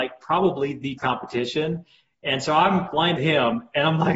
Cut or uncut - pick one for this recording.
cut